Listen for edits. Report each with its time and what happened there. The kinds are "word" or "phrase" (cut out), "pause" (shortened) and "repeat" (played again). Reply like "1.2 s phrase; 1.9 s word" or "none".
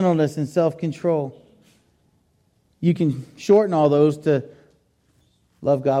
none